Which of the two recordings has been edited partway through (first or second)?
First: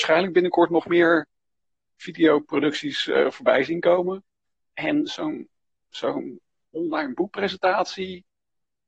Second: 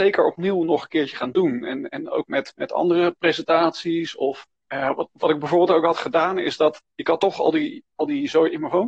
second